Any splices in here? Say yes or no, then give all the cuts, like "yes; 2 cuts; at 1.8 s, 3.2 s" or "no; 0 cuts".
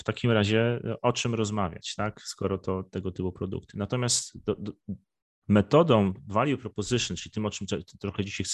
no; 0 cuts